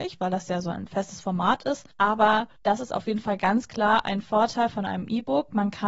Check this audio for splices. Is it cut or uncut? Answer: uncut